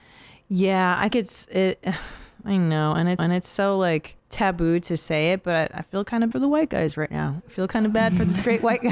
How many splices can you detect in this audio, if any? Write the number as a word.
four